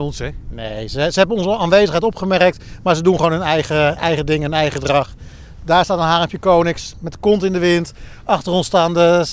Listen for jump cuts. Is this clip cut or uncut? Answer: uncut